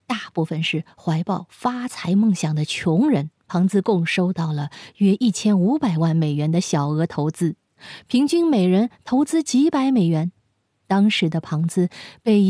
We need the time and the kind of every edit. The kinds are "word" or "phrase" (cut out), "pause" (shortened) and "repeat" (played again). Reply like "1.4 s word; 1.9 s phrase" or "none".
3.4 s pause